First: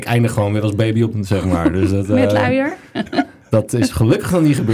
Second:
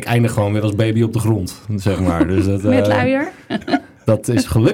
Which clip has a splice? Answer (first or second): first